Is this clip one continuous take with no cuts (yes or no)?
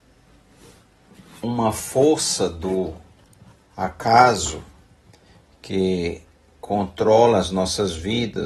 yes